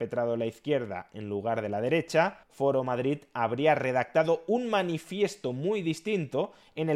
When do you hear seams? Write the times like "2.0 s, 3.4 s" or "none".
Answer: 2.4 s